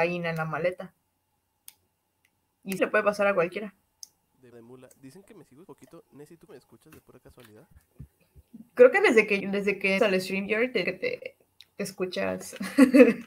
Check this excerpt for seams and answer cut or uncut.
cut